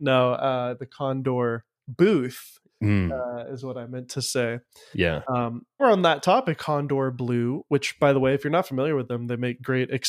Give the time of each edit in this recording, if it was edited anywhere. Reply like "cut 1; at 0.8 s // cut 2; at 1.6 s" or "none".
cut 1; at 1.8 s // cut 2; at 5.8 s // cut 3; at 6.6 s